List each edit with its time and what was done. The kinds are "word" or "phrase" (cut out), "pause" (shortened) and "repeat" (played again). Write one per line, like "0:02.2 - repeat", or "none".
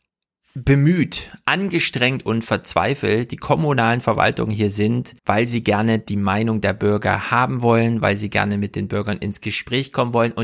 0:05.2 - pause